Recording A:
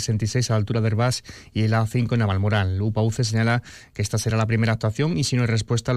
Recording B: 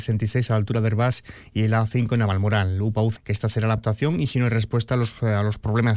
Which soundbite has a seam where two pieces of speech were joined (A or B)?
B